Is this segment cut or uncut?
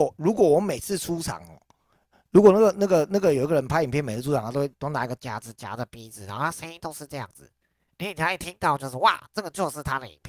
uncut